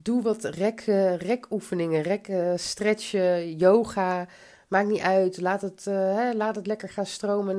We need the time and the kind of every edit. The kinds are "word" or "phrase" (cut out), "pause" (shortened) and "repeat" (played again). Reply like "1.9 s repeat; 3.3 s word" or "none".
none